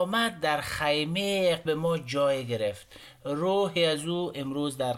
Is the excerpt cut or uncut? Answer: cut